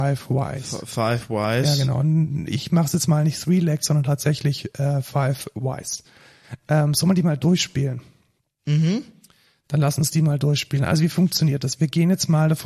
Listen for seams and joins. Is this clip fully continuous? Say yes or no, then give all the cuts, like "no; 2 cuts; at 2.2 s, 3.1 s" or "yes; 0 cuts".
yes; 0 cuts